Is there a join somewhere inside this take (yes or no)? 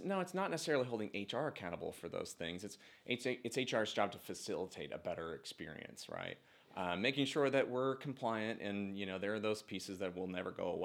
no